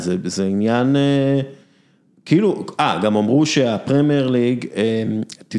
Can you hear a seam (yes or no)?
no